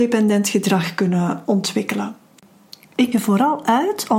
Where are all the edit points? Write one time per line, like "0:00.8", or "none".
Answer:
0:01.5
0:03.1